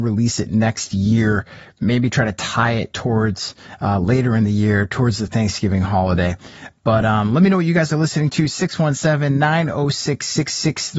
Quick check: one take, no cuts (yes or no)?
yes